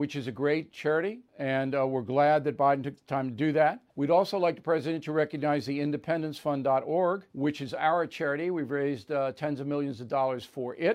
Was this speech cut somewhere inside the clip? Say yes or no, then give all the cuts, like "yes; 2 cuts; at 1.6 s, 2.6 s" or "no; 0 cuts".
yes; 3 cuts; at 1.3 s, 3.9 s, 7.3 s